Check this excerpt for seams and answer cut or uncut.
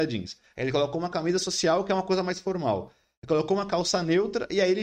uncut